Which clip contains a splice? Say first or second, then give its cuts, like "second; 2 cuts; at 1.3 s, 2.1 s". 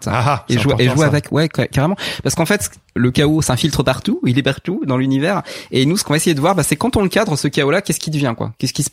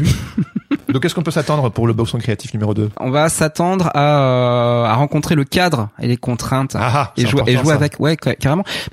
second; 1 cut; at 2.9 s